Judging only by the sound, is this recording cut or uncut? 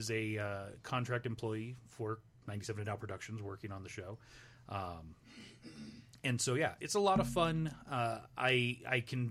cut